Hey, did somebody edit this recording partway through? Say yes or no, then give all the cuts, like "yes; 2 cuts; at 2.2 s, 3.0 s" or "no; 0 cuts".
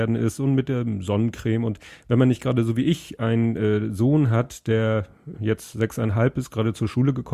yes; 1 cut; at 5.3 s